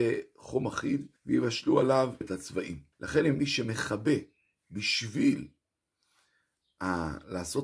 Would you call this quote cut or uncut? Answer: cut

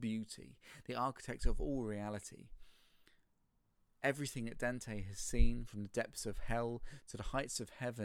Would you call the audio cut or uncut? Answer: uncut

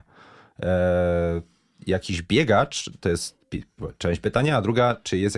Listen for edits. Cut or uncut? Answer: uncut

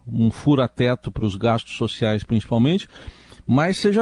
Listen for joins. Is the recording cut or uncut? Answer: uncut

